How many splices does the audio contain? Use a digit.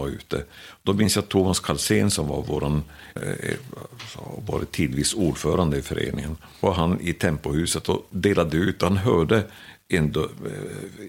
1